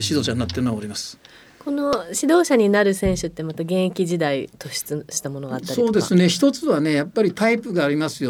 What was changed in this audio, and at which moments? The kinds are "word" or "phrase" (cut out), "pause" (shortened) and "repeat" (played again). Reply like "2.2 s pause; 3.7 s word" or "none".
none